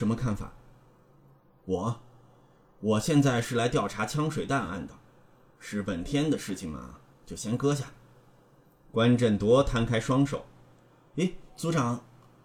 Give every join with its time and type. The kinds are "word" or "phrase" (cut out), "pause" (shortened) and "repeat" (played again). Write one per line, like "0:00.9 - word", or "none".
none